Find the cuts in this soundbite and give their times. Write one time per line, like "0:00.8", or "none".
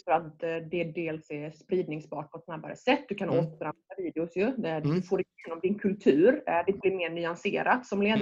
0:06.8